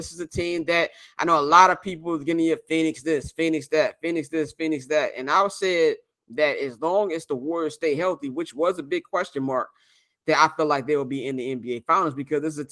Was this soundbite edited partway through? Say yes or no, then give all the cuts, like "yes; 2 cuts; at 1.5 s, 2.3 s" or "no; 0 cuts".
no; 0 cuts